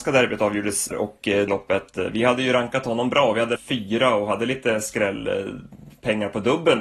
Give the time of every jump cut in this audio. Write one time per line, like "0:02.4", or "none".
0:00.9
0:01.5
0:03.6